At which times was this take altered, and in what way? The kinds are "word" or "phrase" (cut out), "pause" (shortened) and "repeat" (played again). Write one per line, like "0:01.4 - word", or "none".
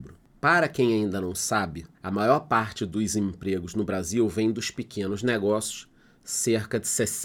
0:01.9 - pause

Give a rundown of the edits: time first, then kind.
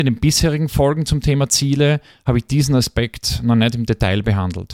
none

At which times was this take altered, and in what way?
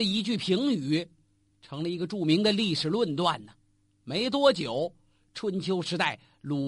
none

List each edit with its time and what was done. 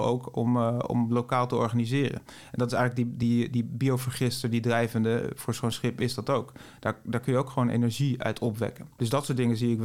none

